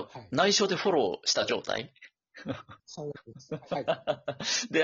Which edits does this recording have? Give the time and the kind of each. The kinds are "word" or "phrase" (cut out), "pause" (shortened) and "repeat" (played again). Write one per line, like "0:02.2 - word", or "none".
0:02.8 - pause